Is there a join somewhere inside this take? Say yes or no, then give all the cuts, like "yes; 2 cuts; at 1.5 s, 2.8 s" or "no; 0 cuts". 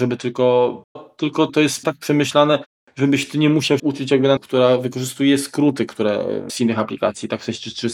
yes; 6 cuts; at 1.0 s, 1.5 s, 1.8 s, 3.8 s, 4.4 s, 6.5 s